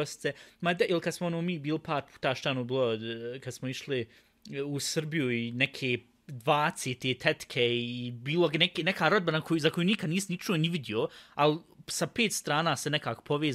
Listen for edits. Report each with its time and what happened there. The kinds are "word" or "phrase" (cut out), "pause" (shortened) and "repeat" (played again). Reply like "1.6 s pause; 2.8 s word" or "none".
none